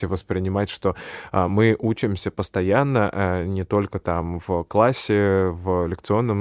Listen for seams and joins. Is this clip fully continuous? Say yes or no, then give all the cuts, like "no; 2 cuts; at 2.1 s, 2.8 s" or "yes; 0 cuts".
yes; 0 cuts